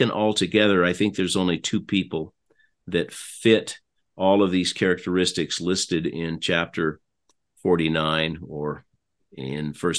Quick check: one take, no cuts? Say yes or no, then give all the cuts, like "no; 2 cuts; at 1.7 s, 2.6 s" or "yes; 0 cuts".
yes; 0 cuts